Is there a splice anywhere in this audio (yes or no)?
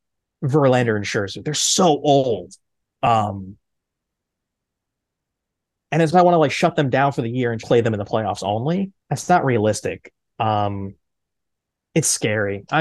yes